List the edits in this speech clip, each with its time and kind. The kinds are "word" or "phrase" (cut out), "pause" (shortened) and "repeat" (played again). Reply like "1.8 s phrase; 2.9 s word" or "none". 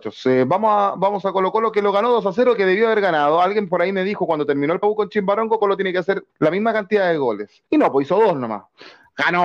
4.8 s phrase; 5.6 s word; 6.3 s pause; 7.7 s pause